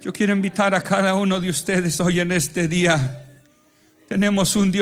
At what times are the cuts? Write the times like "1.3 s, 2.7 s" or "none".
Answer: none